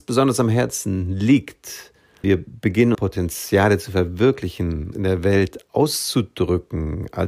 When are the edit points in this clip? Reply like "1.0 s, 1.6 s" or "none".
2.2 s, 2.9 s, 4.9 s